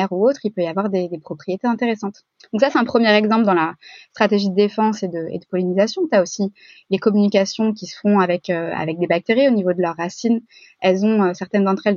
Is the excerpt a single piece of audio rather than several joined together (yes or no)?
yes